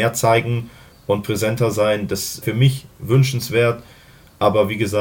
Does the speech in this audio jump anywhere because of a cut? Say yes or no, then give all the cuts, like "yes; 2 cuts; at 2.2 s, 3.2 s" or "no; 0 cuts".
yes; 1 cut; at 2.4 s